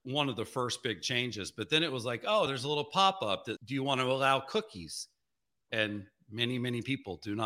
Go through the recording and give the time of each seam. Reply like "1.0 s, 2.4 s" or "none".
2.5 s, 3.6 s